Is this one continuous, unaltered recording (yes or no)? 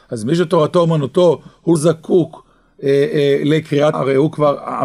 no